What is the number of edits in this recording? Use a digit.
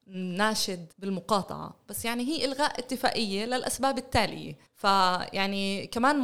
2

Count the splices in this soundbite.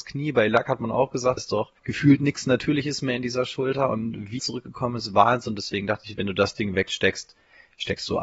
3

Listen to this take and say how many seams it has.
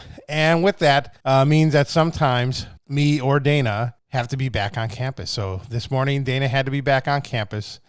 3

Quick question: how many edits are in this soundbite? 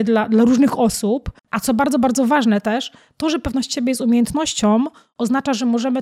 1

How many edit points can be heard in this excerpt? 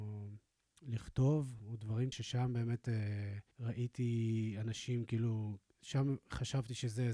2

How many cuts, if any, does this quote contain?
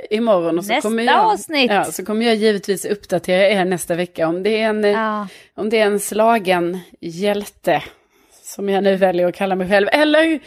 0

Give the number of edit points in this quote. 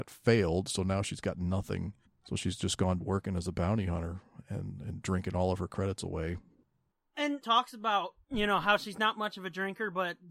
4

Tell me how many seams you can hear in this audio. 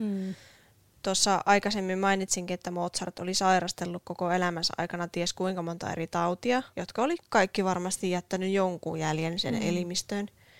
1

